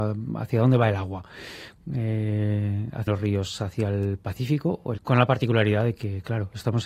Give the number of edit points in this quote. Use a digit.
2